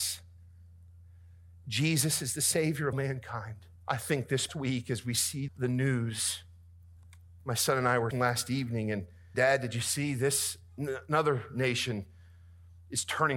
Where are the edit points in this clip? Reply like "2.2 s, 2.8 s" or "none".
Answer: 2.9 s, 3.8 s, 4.5 s, 5.5 s, 7.0 s, 8.1 s, 9.3 s